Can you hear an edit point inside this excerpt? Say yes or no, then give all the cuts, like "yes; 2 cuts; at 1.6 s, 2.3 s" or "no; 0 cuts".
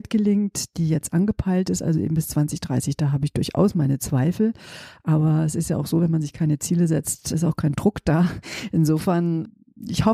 no; 0 cuts